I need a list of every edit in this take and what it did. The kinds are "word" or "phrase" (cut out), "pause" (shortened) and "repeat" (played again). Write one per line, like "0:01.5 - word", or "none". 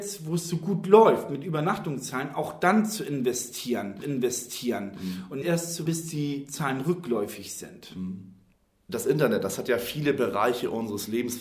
0:04.0 - repeat
0:05.4 - word
0:05.9 - word